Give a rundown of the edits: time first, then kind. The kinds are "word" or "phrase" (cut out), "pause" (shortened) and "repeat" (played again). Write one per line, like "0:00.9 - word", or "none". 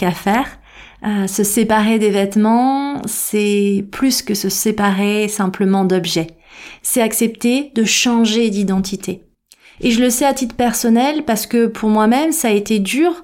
none